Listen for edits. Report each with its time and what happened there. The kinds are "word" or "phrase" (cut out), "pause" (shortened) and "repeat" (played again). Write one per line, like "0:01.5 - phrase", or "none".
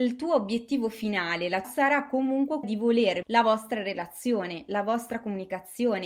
0:01.6 - phrase
0:02.6 - word
0:03.2 - word

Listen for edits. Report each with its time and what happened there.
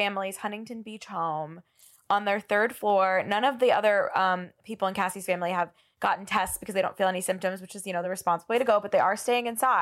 none

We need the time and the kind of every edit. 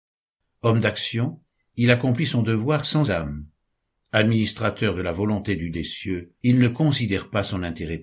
0:03.0 - word
0:05.7 - word
0:06.4 - pause

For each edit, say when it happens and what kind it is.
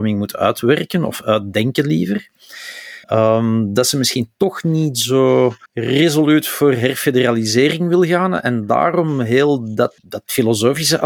0:03.0 - pause
0:05.7 - pause
0:10.0 - pause

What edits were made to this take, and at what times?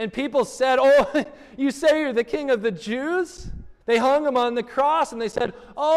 0:03.8 - pause

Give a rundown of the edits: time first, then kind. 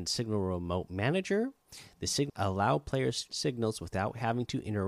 0:02.3 - word
0:03.3 - word

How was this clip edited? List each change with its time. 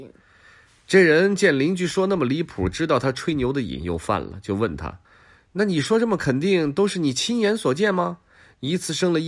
0:05.0 - pause

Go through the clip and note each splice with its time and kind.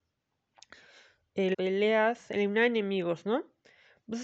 0:01.5 - word

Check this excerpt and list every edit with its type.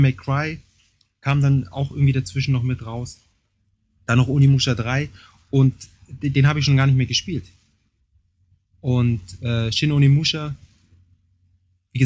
none

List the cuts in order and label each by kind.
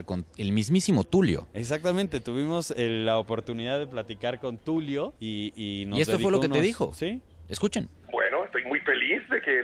0:05.2 - pause

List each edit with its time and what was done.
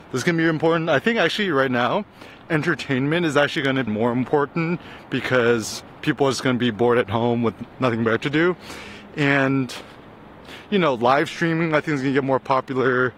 0:03.9 - word

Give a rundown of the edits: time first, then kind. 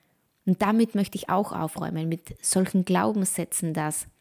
none

